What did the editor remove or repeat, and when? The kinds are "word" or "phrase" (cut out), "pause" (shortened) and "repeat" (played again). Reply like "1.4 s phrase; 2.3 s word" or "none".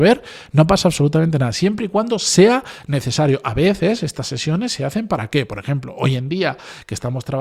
none